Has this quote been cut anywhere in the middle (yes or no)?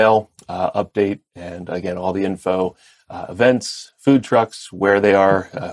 no